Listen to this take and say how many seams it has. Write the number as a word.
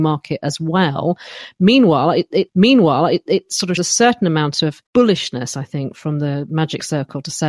three